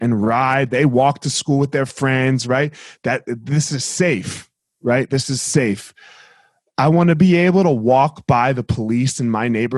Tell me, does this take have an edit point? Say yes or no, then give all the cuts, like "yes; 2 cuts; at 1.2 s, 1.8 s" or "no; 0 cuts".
no; 0 cuts